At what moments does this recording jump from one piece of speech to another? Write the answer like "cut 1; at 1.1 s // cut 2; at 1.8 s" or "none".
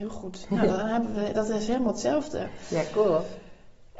none